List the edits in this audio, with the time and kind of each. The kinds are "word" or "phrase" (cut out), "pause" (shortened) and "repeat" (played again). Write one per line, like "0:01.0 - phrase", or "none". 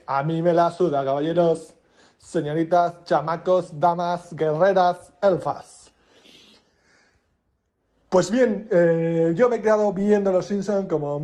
none

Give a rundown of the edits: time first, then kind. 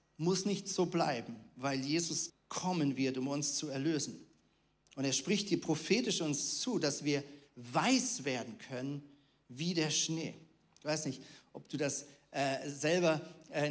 0:02.3 - word

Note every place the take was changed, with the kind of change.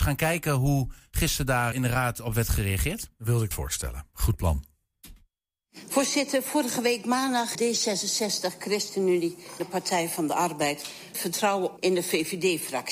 0:01.7 - word
0:03.5 - word
0:07.5 - word
0:09.6 - word
0:11.1 - word
0:11.8 - word

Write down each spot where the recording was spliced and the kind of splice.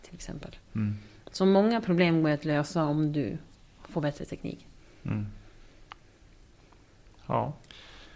none

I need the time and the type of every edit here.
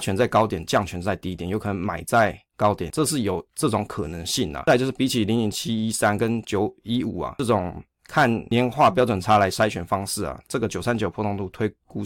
0:02.9 - phrase

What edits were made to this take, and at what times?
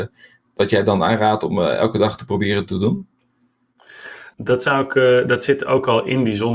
0:04.3 - pause

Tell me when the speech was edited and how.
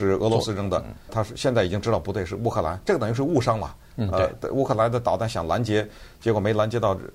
0:01.1 - word

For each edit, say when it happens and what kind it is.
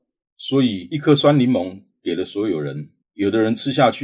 none

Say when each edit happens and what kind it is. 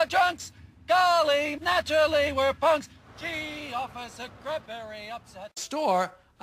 0:01.6 - word
0:04.7 - word

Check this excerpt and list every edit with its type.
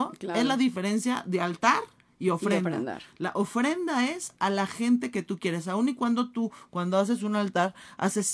none

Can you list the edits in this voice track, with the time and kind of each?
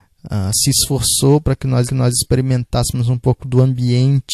0:01.9 - repeat

